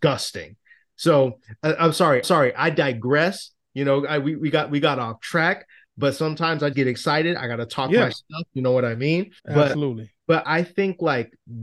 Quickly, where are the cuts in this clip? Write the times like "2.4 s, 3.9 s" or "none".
2.2 s, 6.7 s, 9.4 s, 10.4 s